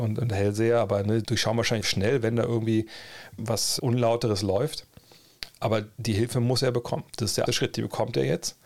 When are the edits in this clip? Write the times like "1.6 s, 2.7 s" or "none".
1.2 s, 1.8 s, 3.4 s, 3.8 s, 7.1 s, 7.5 s